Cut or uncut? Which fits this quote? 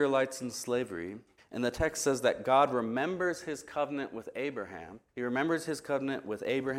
cut